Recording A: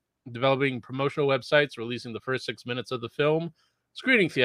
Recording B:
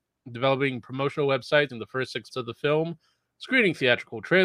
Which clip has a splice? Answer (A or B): B